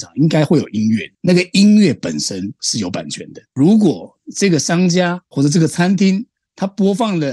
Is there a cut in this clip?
yes; 2 cuts; at 1.1 s, 3.5 s

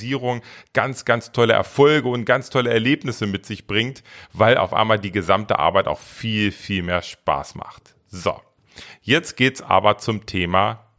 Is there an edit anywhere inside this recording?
no; 0 cuts

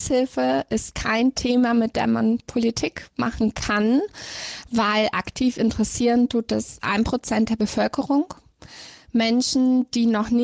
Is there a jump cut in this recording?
no; 0 cuts

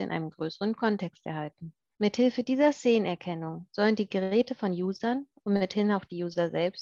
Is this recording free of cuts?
yes; 0 cuts

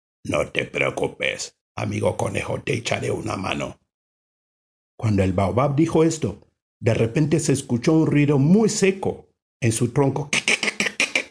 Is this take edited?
yes; 1 cut; at 1.6 s

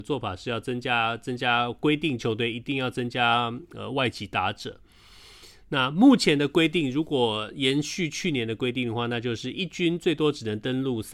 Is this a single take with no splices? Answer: yes; 0 cuts

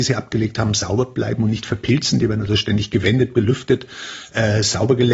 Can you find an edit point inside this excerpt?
no; 0 cuts

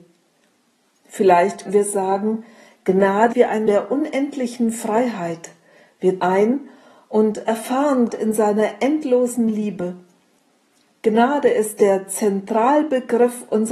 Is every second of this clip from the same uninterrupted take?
no; 5 cuts; at 1.7 s, 3.3 s, 3.7 s, 6.2 s, 8.1 s

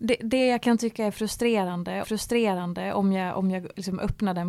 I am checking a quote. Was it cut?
yes; 1 cut; at 2.0 s

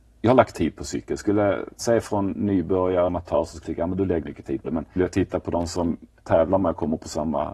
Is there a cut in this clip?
yes; 7 cuts; at 1.8 s, 3.1 s, 3.6 s, 4.2 s, 4.6 s, 5.0 s, 6.2 s

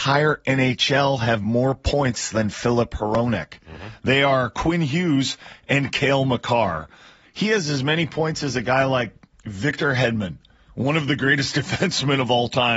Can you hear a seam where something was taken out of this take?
no; 0 cuts

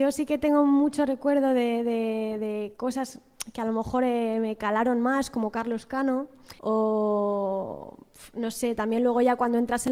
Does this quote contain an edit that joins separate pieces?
yes; 1 cut; at 6.6 s

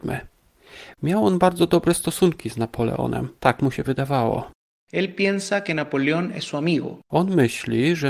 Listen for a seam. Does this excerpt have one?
yes; 4 cuts; at 3.4 s, 3.8 s, 4.6 s, 7.0 s

